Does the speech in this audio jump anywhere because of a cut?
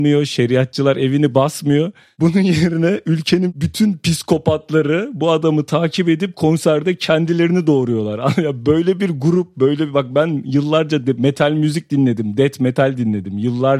no; 0 cuts

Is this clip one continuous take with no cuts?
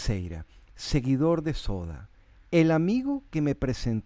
yes; 0 cuts

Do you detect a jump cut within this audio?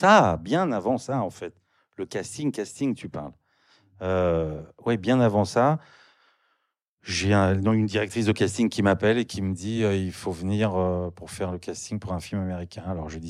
no; 0 cuts

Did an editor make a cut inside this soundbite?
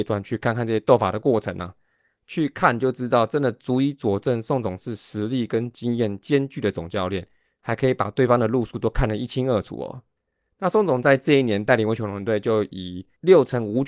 no; 0 cuts

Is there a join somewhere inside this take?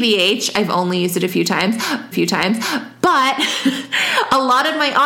yes; 1 cut; at 2.1 s

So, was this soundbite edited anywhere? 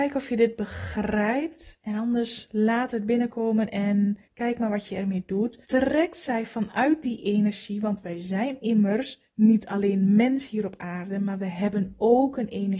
yes; 3 cuts; at 4.2 s, 5.6 s, 9.3 s

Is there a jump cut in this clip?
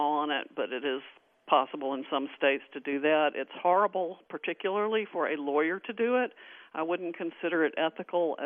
no; 0 cuts

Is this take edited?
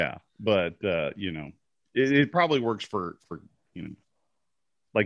no; 0 cuts

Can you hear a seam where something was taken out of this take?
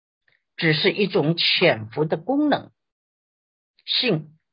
no; 0 cuts

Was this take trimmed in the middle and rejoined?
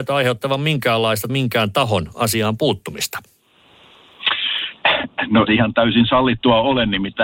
yes; 2 cuts; at 1.3 s, 5.5 s

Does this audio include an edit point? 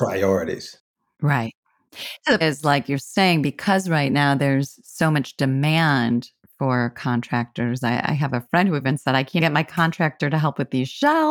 yes; 2 cuts; at 2.4 s, 9.4 s

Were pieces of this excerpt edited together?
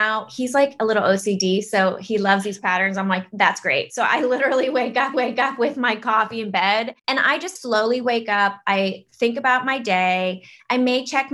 yes; 3 cuts; at 5.1 s, 7.0 s, 7.6 s

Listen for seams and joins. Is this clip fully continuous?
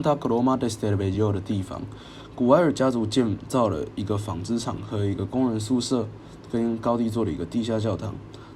yes; 0 cuts

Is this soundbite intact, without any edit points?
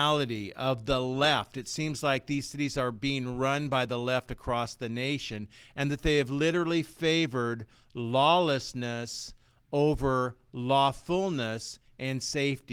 yes; 0 cuts

